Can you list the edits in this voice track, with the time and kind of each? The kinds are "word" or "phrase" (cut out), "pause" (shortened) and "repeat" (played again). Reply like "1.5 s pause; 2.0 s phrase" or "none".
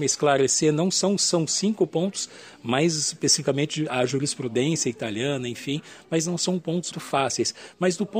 6.9 s word